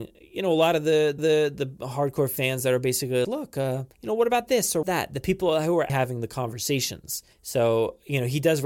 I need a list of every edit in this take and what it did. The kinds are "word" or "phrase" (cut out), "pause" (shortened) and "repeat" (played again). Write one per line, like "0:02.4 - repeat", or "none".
0:01.2 - repeat
0:03.2 - word
0:03.9 - pause
0:04.8 - phrase
0:05.9 - word
0:07.3 - pause